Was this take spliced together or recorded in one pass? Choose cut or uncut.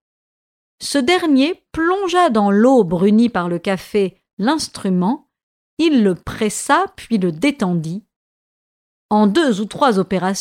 uncut